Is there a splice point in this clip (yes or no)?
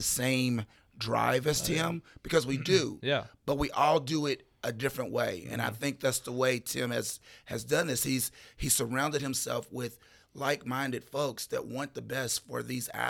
no